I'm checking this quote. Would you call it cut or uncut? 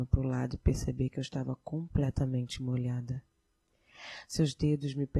uncut